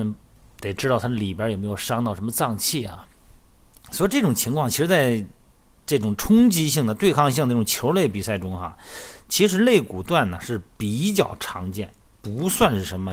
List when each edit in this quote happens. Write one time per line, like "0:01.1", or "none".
none